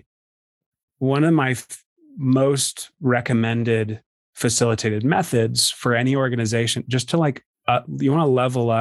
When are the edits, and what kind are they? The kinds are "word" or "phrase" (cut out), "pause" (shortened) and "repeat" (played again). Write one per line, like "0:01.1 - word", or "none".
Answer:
none